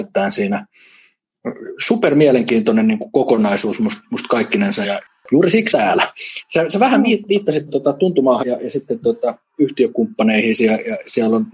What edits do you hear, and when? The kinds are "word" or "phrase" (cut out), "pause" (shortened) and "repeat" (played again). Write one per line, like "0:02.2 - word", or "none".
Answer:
0:04.8 - word
0:05.7 - word
0:07.7 - word
0:08.4 - word